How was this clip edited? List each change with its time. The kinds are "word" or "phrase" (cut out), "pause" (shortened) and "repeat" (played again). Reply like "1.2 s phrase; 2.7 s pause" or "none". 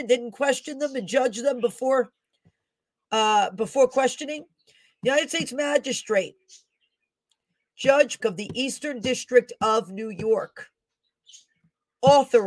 8.2 s word